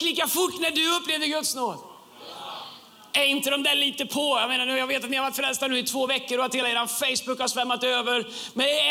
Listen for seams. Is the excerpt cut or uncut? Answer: uncut